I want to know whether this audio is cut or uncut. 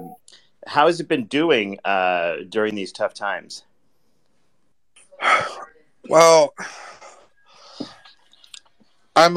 uncut